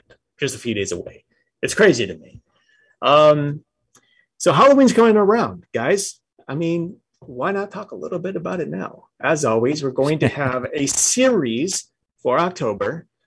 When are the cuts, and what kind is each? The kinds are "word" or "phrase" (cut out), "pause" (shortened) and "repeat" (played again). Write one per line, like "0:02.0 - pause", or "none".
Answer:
none